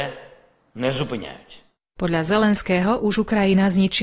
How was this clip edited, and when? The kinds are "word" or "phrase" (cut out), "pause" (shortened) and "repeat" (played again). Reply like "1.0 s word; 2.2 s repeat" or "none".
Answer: none